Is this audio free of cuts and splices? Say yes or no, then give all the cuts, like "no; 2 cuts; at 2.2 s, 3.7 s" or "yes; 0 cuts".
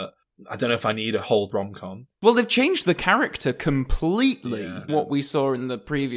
no; 3 cuts; at 1.5 s, 2.1 s, 4.9 s